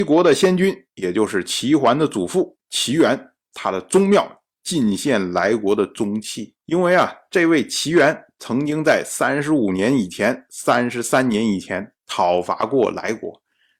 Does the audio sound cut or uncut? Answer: cut